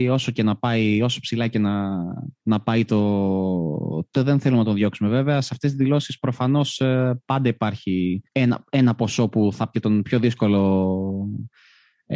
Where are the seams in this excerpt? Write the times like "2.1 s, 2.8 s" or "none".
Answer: 2.4 s, 4.1 s, 8.3 s, 9.7 s